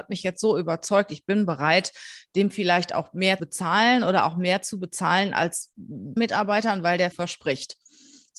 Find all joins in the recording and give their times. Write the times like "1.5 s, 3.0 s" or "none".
3.4 s, 6.2 s, 7.1 s